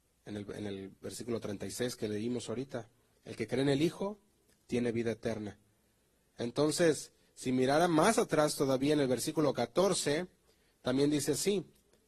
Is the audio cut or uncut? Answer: uncut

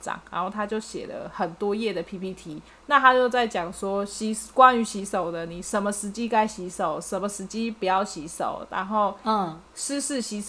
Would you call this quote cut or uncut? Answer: cut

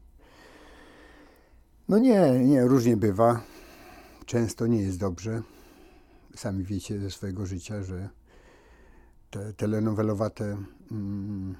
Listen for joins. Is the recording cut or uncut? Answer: uncut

